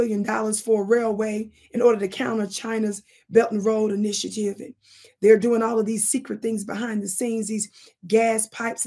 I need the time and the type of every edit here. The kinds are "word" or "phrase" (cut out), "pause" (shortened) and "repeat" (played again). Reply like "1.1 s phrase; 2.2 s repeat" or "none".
none